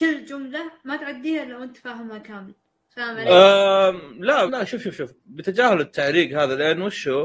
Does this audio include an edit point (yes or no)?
yes